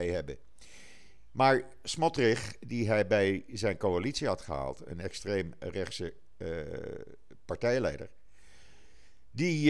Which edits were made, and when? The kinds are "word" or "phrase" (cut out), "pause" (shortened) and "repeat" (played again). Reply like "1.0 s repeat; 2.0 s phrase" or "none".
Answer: none